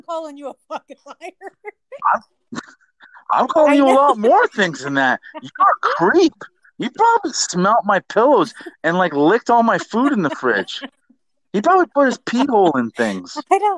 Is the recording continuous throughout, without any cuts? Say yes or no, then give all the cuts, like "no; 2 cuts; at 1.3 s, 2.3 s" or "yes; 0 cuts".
yes; 0 cuts